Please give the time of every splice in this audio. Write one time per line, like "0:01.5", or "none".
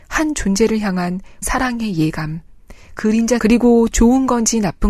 0:01.4
0:03.0
0:03.4